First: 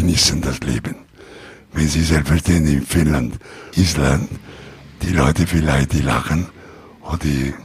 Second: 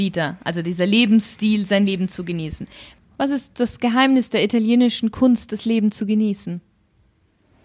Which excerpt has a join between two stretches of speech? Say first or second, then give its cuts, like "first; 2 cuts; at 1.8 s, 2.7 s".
first; 1 cut; at 3.7 s